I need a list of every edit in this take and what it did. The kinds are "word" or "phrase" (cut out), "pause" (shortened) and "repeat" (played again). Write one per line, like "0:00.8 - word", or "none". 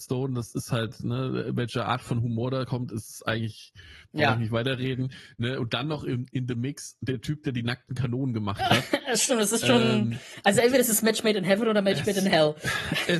none